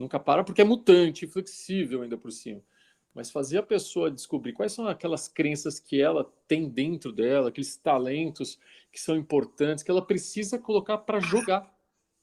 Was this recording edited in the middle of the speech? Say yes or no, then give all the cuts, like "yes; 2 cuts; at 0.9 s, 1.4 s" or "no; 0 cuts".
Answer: no; 0 cuts